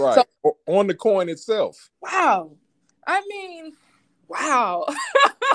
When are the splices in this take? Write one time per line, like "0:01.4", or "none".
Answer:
0:01.9